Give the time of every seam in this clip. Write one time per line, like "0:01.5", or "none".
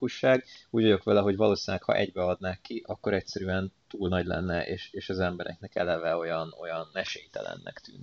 0:06.9